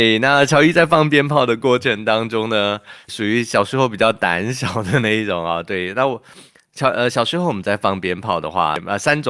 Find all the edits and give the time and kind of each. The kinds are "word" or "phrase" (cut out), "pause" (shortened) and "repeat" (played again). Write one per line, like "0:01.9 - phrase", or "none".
0:03.1 - word